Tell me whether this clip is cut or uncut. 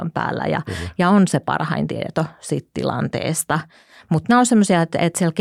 uncut